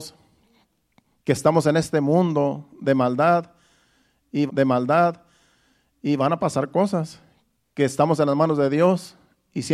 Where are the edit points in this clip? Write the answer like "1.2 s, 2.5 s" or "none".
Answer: 4.5 s, 7.5 s